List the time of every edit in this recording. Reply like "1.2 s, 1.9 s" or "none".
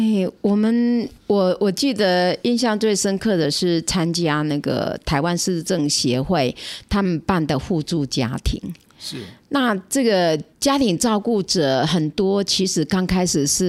1.2 s, 10.5 s